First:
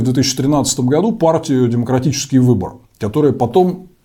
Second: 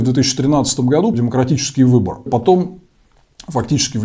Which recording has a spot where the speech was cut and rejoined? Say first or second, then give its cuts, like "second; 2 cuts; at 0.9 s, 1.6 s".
second; 2 cuts; at 1.1 s, 2.3 s